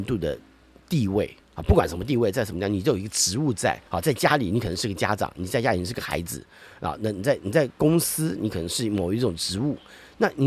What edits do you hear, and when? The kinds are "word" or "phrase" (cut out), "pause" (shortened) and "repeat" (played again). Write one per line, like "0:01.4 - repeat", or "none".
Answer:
0:01.4 - pause
0:03.9 - pause